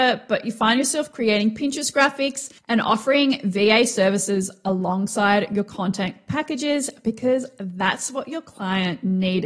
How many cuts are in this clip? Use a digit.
1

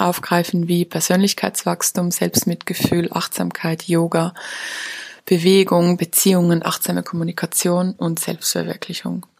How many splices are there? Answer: 0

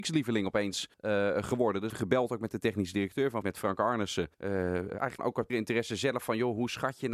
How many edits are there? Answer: 6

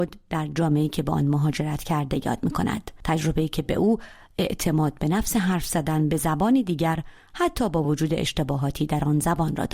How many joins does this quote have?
0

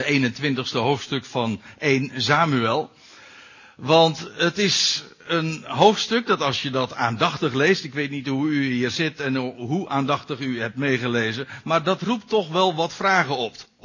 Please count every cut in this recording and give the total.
0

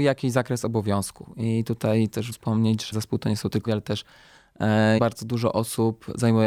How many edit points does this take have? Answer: 4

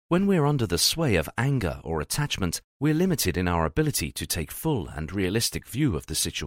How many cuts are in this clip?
1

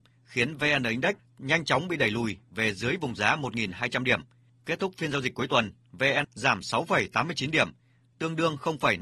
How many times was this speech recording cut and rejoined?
1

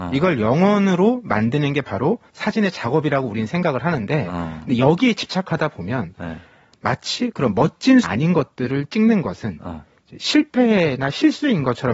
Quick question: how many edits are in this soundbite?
2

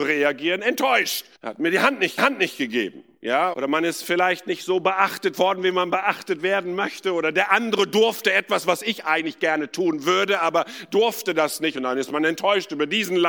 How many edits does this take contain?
3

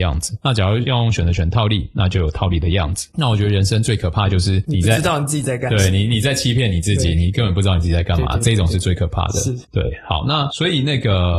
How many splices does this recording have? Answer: 1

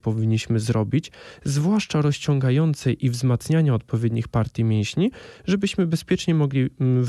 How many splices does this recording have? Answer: 0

